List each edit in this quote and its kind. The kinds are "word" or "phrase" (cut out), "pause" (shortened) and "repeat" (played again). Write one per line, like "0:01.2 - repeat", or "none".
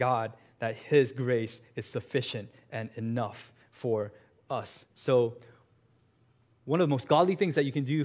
0:04.9 - pause